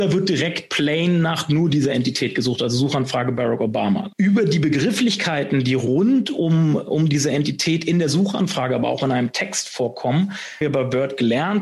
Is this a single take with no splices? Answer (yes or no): no